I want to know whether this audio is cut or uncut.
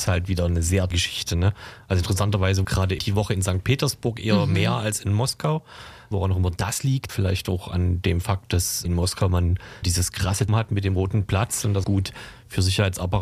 cut